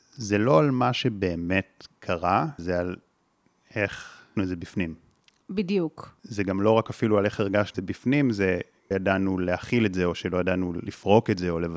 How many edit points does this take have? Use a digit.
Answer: 4